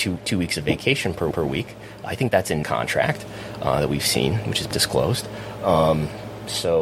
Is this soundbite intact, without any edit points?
no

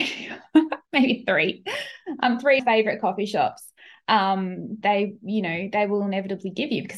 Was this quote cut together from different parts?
yes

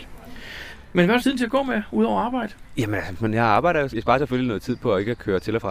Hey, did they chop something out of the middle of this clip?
yes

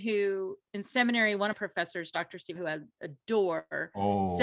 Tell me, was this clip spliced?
yes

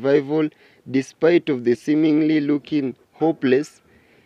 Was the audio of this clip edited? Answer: yes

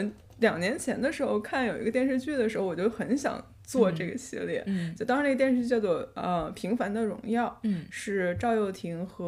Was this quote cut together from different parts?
no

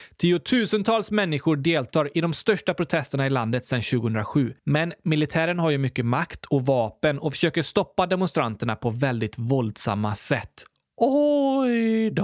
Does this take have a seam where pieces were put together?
yes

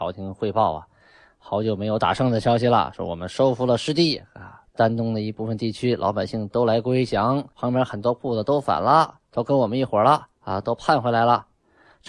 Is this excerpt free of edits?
no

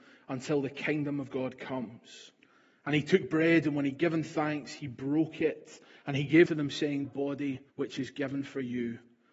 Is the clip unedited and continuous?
no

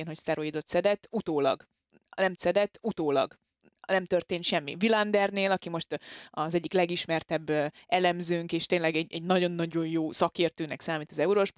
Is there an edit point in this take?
yes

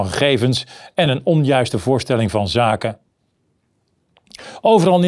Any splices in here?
no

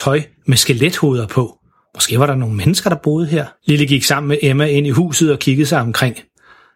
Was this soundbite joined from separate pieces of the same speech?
yes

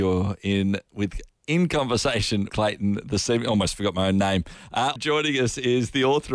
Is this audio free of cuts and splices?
no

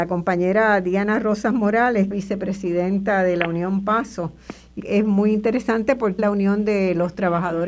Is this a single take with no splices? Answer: no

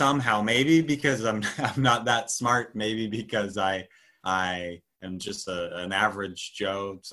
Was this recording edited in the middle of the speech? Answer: no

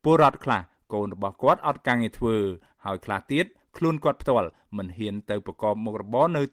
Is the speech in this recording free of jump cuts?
yes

